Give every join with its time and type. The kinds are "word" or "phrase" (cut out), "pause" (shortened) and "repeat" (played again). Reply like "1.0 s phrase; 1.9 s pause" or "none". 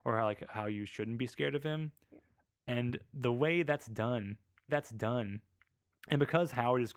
4.7 s repeat